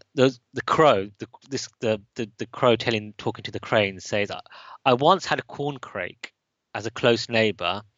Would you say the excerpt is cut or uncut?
uncut